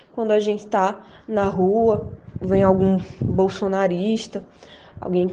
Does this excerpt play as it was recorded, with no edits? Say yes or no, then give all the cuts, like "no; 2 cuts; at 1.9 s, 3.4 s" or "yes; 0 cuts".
yes; 0 cuts